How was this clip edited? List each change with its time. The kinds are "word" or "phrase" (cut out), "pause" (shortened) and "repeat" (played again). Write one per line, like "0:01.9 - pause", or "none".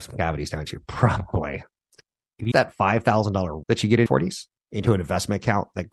0:01.9 - pause
0:02.5 - word
0:03.6 - word
0:04.1 - word
0:04.6 - pause